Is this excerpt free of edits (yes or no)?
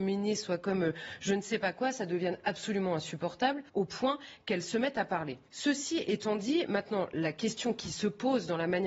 no